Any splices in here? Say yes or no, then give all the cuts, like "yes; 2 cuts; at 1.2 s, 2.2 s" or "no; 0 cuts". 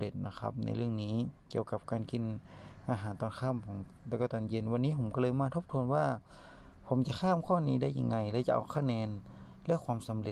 yes; 1 cut; at 1.4 s